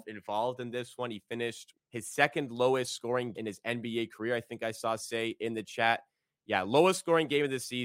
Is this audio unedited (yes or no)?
no